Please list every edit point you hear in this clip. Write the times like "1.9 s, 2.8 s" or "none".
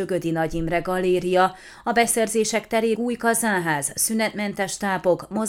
2.9 s